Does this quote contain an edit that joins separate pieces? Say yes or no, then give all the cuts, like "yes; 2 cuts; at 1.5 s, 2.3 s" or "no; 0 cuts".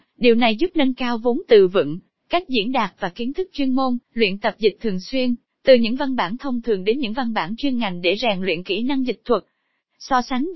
yes; 1 cut; at 4.0 s